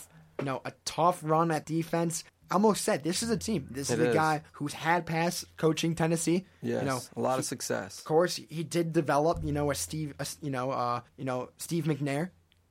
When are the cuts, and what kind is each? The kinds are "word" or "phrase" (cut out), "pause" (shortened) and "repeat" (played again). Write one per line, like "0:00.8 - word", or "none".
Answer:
0:01.6 - word
0:02.3 - pause
0:03.4 - phrase
0:04.5 - pause
0:11.1 - pause